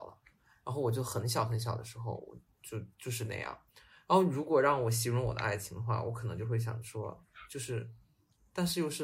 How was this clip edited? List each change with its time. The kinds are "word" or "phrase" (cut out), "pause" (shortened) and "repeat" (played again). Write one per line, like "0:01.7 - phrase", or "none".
0:02.9 - pause